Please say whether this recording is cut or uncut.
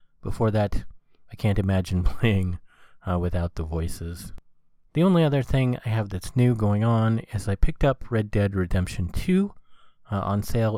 uncut